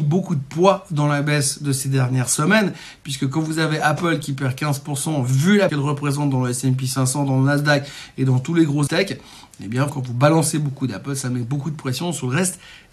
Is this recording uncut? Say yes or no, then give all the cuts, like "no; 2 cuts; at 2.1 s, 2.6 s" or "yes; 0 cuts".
no; 3 cuts; at 5.7 s, 8.9 s, 9.9 s